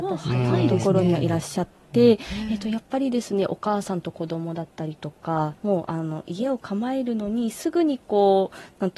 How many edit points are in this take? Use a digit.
1